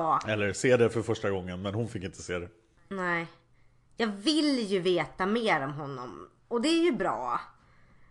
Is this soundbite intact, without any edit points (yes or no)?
yes